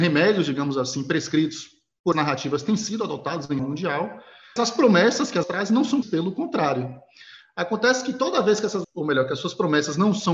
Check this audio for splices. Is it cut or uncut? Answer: cut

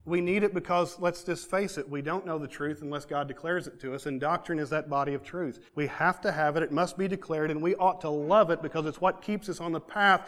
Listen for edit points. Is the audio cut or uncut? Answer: cut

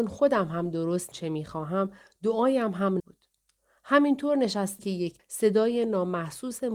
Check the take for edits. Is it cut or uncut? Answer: cut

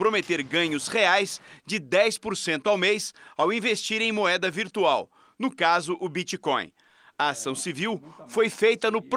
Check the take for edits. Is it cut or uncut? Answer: uncut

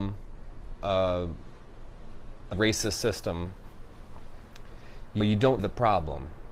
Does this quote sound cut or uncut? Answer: cut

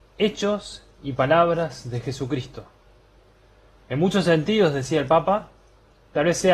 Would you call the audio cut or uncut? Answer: uncut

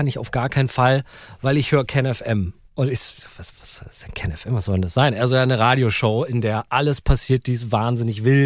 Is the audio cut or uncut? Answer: uncut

